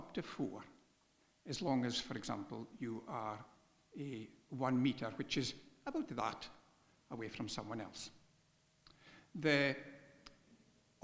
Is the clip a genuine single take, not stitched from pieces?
yes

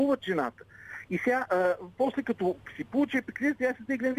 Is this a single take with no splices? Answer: no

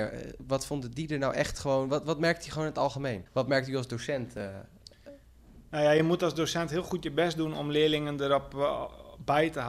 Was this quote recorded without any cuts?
yes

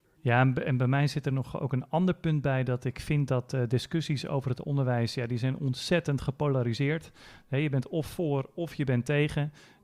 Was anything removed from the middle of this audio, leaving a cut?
no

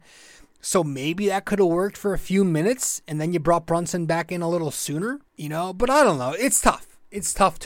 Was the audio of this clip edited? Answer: yes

